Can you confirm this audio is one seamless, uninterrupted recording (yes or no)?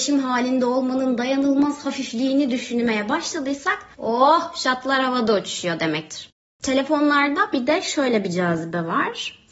yes